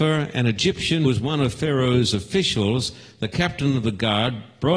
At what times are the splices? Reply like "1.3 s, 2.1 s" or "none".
1.0 s